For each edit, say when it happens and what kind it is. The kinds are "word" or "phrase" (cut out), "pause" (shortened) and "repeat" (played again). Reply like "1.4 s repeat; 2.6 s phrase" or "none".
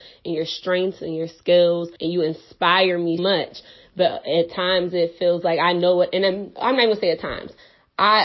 2.0 s pause; 3.2 s word

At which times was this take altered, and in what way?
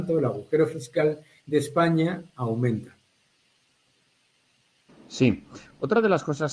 none

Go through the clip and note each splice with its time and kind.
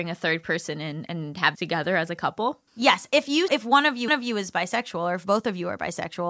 1.5 s phrase; 2.7 s pause; 3.5 s word; 4.1 s repeat

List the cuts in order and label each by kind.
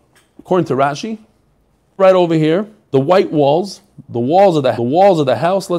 2.0 s phrase; 2.9 s word; 4.8 s repeat

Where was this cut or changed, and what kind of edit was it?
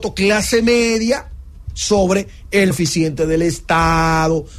2.7 s word

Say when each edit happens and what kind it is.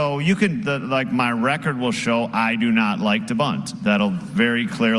none

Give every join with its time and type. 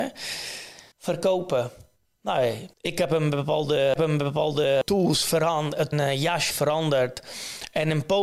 0.9 s pause; 2.7 s pause; 4.0 s repeat; 5.9 s phrase; 6.5 s word

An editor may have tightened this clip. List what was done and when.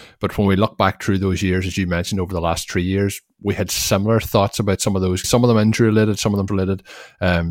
5.2 s word; 6.5 s word

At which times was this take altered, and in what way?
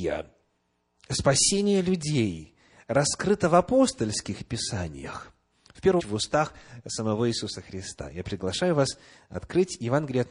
6.0 s word

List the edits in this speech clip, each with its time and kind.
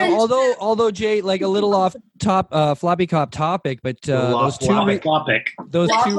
none

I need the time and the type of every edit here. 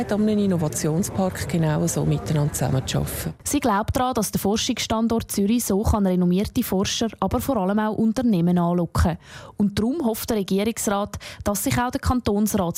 none

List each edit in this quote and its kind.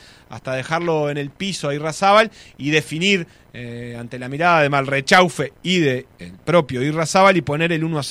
none

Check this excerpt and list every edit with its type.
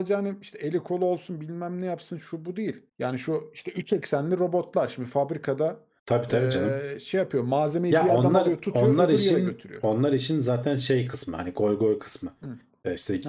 2.9 s pause

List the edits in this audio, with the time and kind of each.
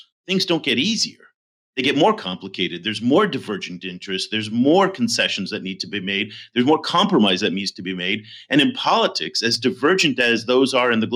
none

